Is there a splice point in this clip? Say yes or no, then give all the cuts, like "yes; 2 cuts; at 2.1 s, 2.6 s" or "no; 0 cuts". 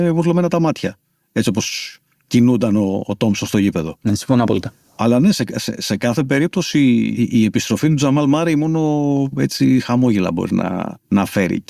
no; 0 cuts